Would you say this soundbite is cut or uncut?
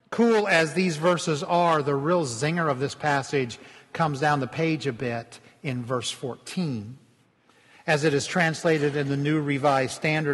uncut